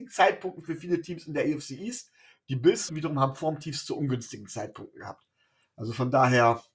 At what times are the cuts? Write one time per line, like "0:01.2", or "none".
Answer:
0:02.9